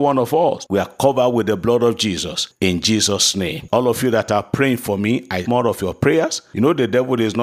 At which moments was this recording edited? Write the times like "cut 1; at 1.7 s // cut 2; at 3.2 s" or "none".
cut 1; at 5.5 s